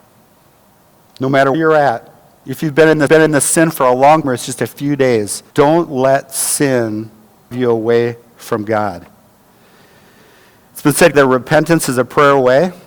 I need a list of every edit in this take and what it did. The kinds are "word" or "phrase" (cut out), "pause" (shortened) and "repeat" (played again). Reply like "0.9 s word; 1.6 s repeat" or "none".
1.5 s word; 3.1 s repeat; 4.2 s word; 5.5 s pause; 7.5 s word; 11.1 s word

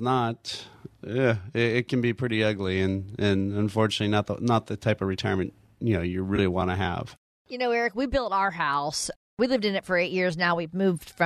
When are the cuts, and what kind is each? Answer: none

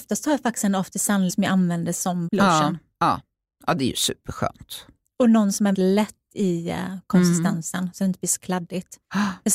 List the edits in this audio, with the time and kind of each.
1.3 s word; 2.3 s word; 5.7 s word

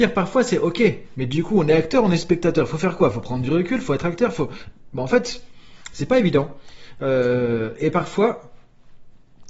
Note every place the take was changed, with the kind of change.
none

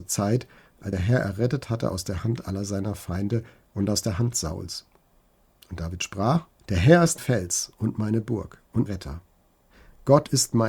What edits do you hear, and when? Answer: 0.9 s word; 6.6 s pause; 7.2 s word; 8.9 s word

